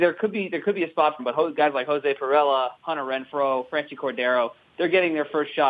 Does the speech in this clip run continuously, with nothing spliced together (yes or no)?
no